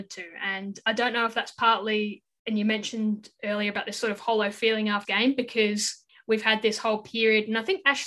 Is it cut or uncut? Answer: cut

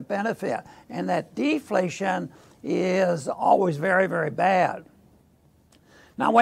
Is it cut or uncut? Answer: uncut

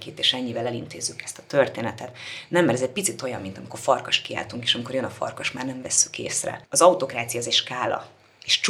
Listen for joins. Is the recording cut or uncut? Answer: uncut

